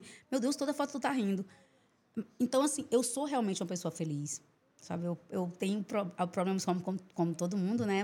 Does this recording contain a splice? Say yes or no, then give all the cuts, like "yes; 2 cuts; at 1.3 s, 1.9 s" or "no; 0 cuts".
no; 0 cuts